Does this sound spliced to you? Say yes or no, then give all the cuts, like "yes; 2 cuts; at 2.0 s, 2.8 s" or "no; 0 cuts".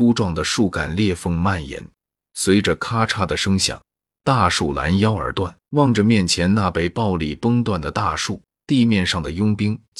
yes; 2 cuts; at 5.6 s, 8.6 s